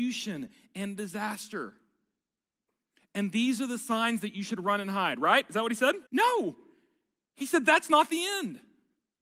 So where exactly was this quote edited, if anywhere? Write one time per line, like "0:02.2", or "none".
0:06.1